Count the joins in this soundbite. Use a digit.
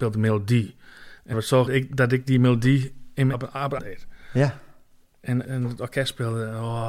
5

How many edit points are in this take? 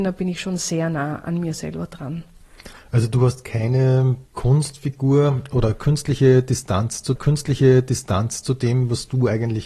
2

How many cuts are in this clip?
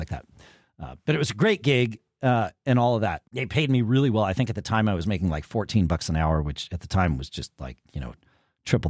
1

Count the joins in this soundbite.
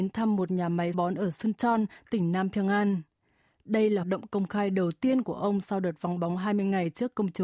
2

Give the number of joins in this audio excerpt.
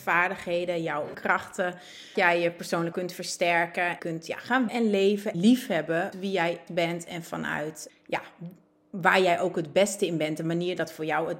9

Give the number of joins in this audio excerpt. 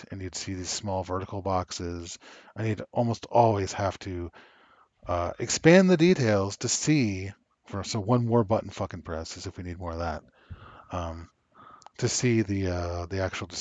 0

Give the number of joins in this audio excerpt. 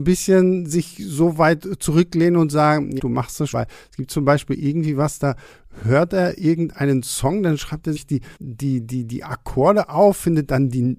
4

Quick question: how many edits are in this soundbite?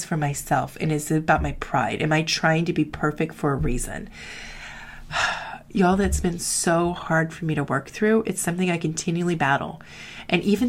0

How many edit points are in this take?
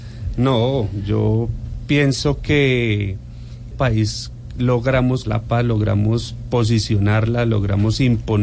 2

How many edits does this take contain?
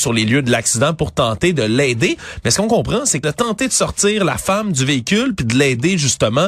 1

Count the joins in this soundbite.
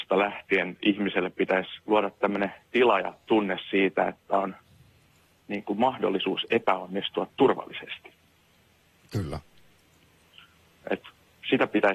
1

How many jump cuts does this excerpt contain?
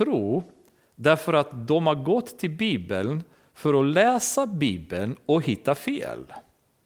0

